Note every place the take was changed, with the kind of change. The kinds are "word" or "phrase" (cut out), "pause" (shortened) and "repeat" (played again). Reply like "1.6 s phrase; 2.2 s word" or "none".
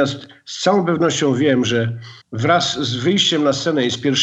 2.2 s pause